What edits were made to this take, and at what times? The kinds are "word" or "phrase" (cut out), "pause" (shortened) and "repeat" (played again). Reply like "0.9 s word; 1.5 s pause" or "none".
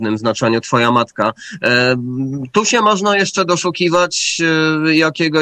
none